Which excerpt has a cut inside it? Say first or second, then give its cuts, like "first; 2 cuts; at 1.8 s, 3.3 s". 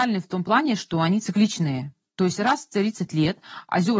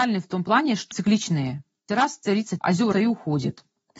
second; 4 cuts; at 0.9 s, 1.9 s, 2.6 s, 2.9 s